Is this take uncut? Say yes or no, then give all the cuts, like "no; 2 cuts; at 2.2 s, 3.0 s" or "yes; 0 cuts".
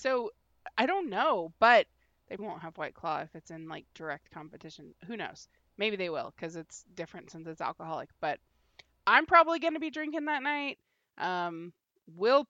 no; 1 cut; at 2.4 s